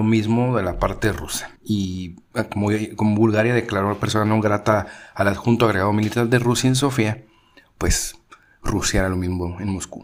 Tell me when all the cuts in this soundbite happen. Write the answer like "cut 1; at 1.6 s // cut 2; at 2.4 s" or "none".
cut 1; at 1.6 s